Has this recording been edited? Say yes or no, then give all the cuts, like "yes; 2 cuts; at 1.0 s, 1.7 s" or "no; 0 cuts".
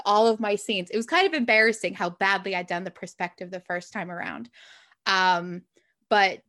no; 0 cuts